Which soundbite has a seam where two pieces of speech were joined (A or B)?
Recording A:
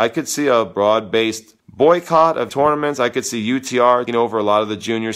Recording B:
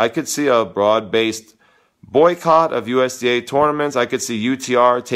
A